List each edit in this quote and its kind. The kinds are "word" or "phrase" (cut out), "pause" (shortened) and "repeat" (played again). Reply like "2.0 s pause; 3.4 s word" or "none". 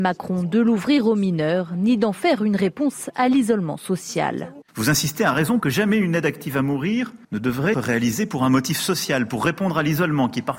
4.7 s pause; 5.6 s word; 7.2 s pause; 7.7 s phrase